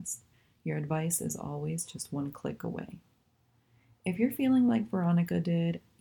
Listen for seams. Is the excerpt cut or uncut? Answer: uncut